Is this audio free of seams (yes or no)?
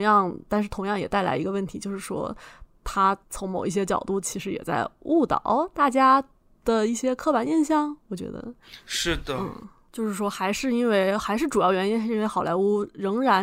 no